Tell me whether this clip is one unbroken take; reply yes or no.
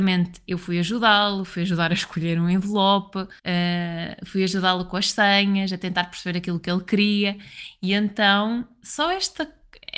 no